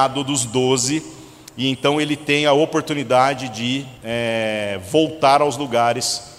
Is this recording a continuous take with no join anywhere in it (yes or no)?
no